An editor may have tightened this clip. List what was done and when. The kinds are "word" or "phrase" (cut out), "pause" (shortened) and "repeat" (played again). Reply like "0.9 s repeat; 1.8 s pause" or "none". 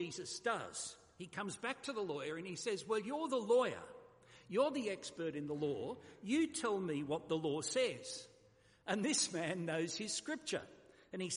none

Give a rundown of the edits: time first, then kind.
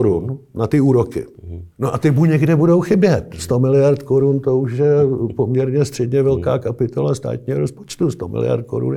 1.7 s pause

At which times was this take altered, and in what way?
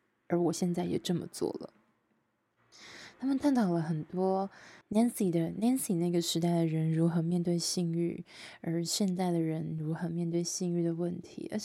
4.8 s pause

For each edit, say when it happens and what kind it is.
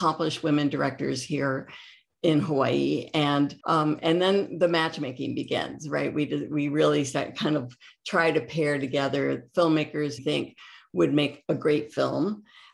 3.6 s pause; 10.2 s phrase

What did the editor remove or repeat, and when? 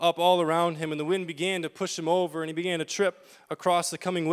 none

